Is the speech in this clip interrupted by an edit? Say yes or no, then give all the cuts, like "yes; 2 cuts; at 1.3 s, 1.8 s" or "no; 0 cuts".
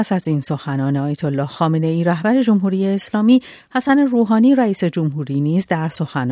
no; 0 cuts